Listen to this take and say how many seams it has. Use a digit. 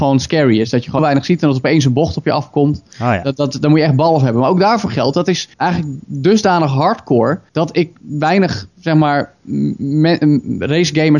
3